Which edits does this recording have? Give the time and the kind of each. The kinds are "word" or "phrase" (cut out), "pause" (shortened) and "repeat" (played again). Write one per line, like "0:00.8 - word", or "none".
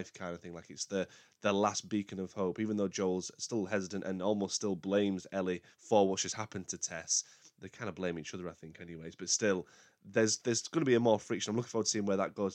0:05.7 - pause

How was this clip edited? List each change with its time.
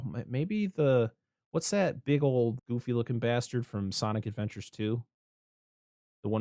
0:02.6 - word

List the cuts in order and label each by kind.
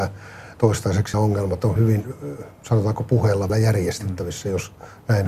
0:01.1 - word
0:01.8 - word
0:03.5 - word

